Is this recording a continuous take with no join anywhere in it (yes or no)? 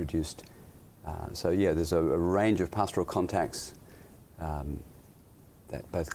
yes